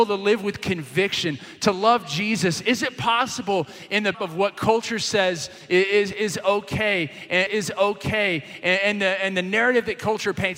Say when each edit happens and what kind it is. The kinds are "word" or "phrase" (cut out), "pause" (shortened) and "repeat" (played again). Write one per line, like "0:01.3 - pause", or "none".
0:04.1 - word
0:07.5 - repeat